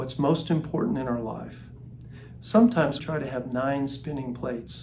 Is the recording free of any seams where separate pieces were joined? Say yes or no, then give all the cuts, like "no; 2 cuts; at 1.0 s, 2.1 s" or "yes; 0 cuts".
no; 1 cut; at 3.0 s